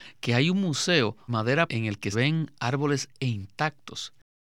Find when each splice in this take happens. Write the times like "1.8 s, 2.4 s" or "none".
1.3 s, 1.7 s, 2.1 s, 3.1 s